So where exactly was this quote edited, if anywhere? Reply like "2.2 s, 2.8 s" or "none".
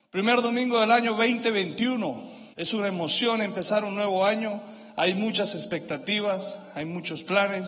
2.5 s